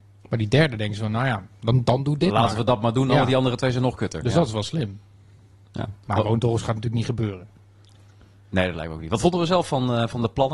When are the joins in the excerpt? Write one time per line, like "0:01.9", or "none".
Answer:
none